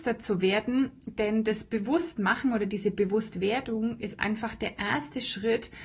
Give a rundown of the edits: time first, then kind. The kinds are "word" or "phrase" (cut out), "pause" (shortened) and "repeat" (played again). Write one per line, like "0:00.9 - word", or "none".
none